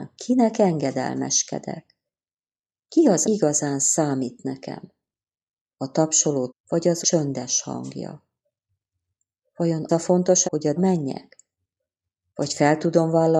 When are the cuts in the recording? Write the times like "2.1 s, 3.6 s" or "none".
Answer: 3.2 s, 6.5 s, 7.0 s, 9.9 s, 10.4 s, 10.8 s